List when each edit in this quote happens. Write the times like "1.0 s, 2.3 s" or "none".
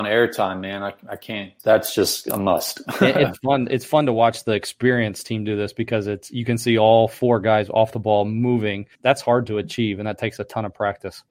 1.6 s, 8.9 s